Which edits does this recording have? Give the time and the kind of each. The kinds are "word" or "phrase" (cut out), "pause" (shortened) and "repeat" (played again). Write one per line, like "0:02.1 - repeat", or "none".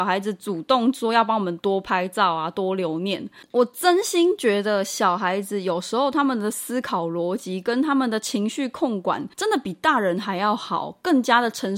0:09.3 - pause